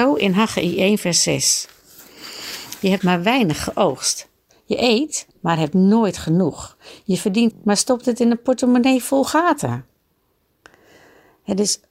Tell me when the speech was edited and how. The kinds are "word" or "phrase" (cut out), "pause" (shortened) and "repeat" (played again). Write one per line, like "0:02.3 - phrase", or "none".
0:03.0 - phrase
0:04.5 - pause
0:05.3 - pause
0:07.5 - word